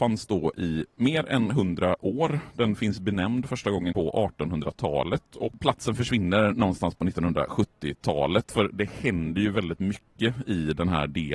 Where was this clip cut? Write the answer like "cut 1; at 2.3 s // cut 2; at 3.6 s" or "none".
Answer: cut 1; at 3.9 s